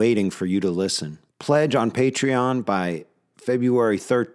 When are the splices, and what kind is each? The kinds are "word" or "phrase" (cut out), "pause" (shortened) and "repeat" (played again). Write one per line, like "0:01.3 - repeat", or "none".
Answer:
0:01.3 - pause